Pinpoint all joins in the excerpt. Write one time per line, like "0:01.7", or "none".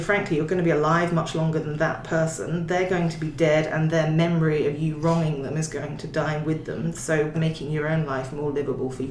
0:07.3

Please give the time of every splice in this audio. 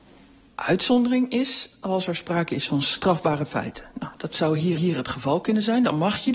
0:04.8

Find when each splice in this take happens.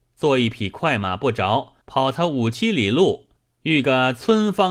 0:01.8
0:03.4

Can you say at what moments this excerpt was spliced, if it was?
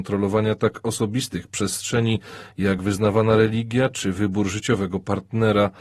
none

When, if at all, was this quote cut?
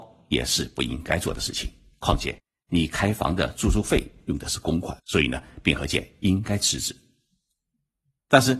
0:05.0

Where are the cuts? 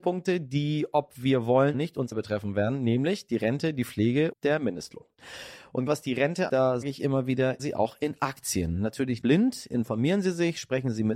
0:01.7
0:02.1
0:04.3
0:05.9
0:06.5
0:06.8
0:07.6
0:09.2

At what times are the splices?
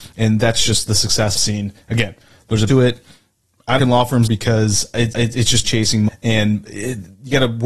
0:01.3
0:02.7
0:03.8
0:04.3
0:05.1
0:05.6
0:06.1

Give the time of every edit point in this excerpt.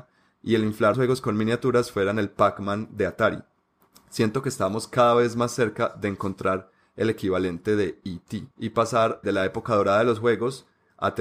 0:00.9
0:08.5
0:09.2

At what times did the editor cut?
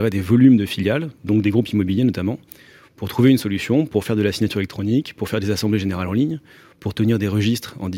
none

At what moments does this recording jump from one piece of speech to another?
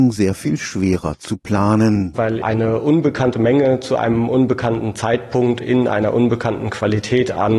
0:02.4

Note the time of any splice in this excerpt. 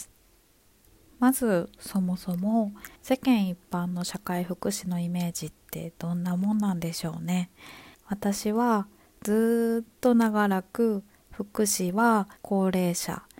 0:03.0
0:07.9
0:12.4

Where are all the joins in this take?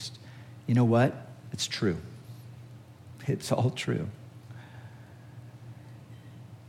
none

